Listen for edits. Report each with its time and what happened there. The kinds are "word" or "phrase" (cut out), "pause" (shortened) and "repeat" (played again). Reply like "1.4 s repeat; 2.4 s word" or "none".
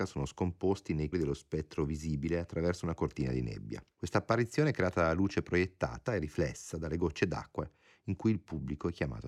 1.1 s word; 3.9 s pause; 6.1 s word